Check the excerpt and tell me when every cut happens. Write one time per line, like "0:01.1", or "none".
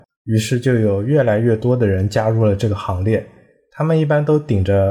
none